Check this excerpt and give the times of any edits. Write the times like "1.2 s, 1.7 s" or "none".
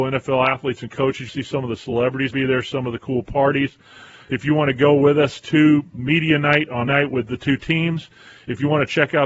1.3 s, 2.3 s, 5.9 s, 6.9 s